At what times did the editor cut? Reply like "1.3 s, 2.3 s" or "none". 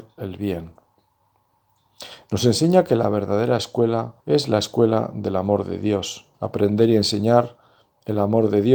4.2 s, 6.3 s

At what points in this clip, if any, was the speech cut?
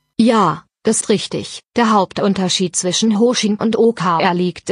1.0 s, 1.7 s, 3.6 s

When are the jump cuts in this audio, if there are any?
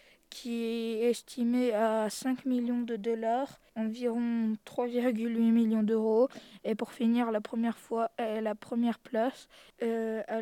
3.7 s

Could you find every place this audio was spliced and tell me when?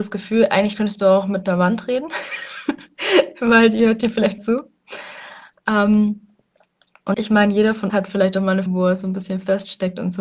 4.4 s, 7.1 s, 7.9 s, 8.7 s

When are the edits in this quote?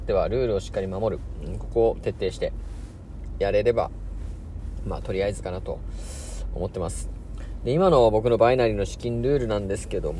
5.4 s

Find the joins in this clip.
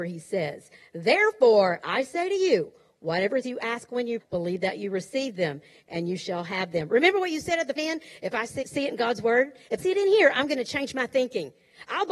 3.4 s, 4.2 s, 7.8 s, 8.6 s, 9.8 s

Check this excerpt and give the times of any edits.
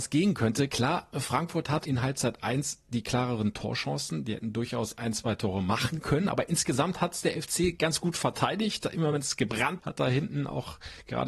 1.8 s, 9.8 s

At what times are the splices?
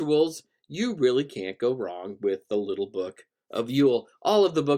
none

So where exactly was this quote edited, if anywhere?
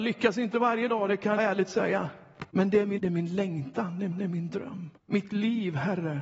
1.4 s, 2.5 s, 3.0 s, 4.1 s, 5.0 s

